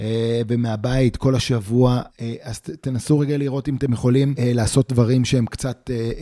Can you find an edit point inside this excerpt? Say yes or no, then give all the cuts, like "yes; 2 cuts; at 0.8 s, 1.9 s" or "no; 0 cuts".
yes; 2 cuts; at 2.1 s, 4.4 s